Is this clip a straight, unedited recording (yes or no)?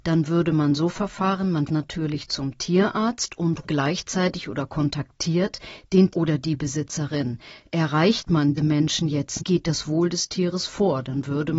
no